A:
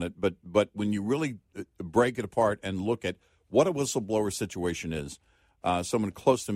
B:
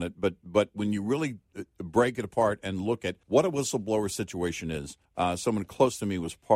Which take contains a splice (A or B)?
B